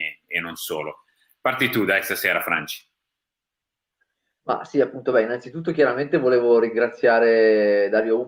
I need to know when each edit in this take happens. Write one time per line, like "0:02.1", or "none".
none